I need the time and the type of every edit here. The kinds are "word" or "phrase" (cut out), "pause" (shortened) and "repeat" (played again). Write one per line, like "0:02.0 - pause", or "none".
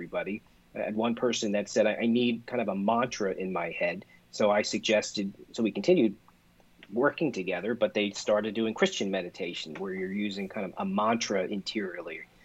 none